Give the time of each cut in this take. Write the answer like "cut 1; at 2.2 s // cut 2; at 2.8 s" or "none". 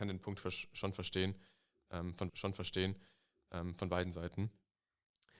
cut 1; at 2.3 s